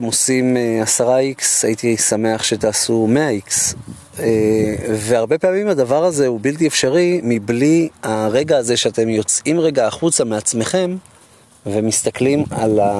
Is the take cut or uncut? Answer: uncut